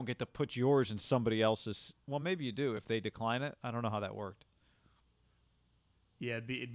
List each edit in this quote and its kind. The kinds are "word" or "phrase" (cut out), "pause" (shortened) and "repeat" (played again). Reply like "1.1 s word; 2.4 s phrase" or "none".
none